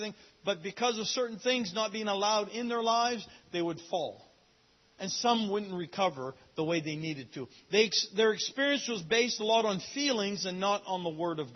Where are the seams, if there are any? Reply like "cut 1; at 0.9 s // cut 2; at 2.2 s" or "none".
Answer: none